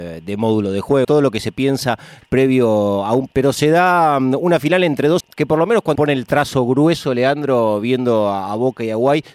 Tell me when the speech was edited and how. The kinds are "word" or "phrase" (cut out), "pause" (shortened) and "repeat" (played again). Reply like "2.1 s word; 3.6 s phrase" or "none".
1.0 s word; 3.3 s word; 5.2 s word; 6.0 s word